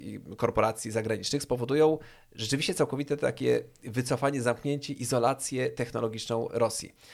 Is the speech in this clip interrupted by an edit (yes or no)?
no